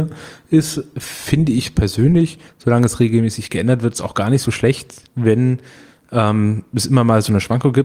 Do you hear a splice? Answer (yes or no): no